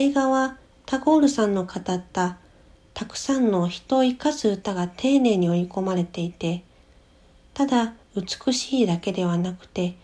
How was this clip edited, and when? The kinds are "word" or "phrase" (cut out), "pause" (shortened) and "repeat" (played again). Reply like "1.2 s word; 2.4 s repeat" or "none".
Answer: 8.0 s pause